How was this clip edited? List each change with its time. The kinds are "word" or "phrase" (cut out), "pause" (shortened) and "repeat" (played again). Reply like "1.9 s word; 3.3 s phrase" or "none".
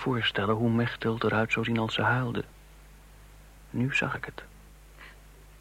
none